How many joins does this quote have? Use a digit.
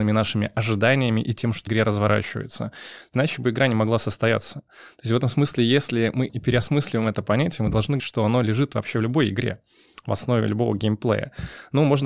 4